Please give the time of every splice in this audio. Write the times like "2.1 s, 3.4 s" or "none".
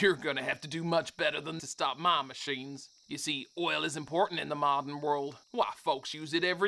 1.6 s, 5.4 s